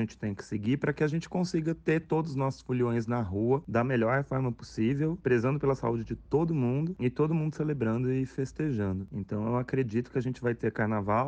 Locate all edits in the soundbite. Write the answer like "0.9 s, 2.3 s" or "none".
none